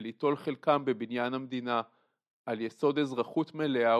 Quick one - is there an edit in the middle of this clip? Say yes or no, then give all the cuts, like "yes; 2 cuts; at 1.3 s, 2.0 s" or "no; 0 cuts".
no; 0 cuts